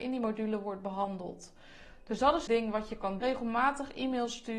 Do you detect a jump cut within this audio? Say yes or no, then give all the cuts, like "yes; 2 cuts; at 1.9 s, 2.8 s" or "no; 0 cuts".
yes; 2 cuts; at 2.5 s, 3.2 s